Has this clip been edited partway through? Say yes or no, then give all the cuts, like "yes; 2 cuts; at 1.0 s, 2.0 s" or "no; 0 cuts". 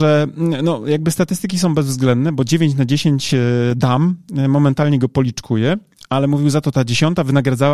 no; 0 cuts